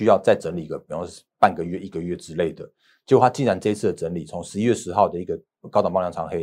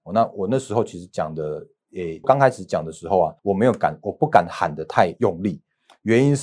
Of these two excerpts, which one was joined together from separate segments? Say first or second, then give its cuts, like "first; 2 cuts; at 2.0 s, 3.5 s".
second; 2 cuts; at 2.2 s, 3.4 s